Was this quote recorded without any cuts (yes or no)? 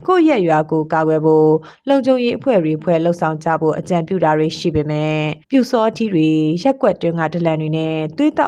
no